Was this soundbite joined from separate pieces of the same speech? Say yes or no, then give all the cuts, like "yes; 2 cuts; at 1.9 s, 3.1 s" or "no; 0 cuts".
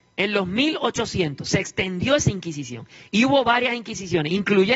no; 0 cuts